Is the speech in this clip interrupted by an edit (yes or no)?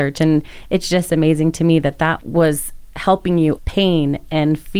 yes